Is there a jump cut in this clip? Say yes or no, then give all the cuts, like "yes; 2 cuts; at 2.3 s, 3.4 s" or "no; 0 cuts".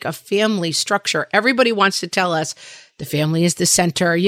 no; 0 cuts